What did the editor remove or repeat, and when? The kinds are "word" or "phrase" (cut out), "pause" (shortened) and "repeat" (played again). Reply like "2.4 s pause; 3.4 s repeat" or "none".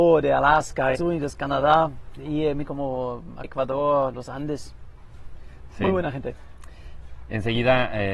0.9 s word; 2.6 s phrase; 3.4 s word